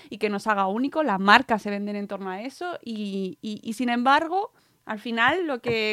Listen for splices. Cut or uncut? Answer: cut